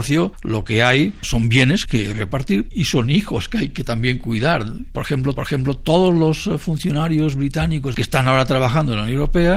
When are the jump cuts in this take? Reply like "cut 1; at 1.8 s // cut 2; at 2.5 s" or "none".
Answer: cut 1; at 5.4 s